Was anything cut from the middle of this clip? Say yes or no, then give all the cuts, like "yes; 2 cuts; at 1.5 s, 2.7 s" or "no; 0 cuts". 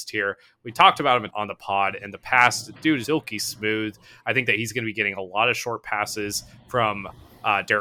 yes; 2 cuts; at 1.3 s, 3.0 s